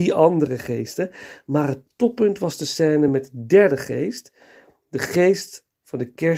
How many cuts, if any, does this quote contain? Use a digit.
0